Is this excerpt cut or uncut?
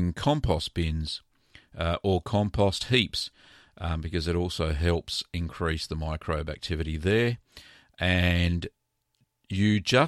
uncut